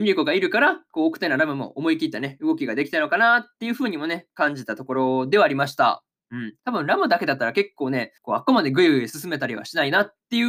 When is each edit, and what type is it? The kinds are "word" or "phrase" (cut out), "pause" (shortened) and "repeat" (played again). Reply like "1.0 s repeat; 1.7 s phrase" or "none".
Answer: 6.6 s pause; 8.2 s pause